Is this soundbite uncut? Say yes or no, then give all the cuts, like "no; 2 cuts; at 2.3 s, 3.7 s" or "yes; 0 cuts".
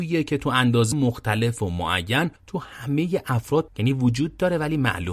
no; 3 cuts; at 0.9 s, 2.4 s, 3.7 s